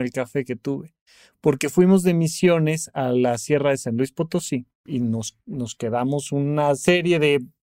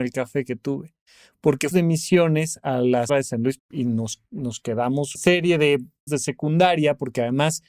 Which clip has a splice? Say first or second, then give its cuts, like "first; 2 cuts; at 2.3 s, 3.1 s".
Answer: second; 5 cuts; at 1.7 s, 3.1 s, 3.6 s, 5.1 s, 6.1 s